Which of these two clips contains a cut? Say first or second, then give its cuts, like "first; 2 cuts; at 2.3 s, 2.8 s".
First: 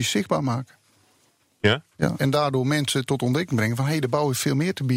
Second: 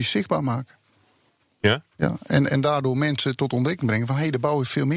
first; 1 cut; at 2.2 s